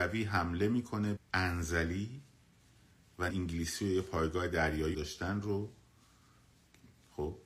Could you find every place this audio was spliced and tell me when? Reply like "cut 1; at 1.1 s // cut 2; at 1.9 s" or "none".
cut 1; at 1.2 s // cut 2; at 3.3 s // cut 3; at 4.9 s